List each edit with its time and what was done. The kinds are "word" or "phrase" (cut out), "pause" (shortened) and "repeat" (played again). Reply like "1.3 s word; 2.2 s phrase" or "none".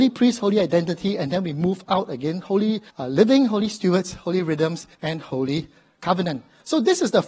2.9 s pause; 4.9 s pause